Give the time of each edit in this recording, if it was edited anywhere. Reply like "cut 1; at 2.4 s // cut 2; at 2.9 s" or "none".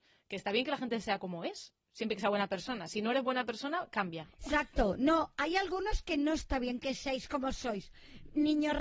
cut 1; at 1.8 s